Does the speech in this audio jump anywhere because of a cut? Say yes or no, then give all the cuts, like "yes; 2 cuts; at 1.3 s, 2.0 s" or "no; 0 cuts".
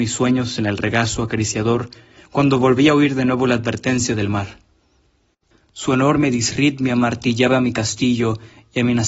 no; 0 cuts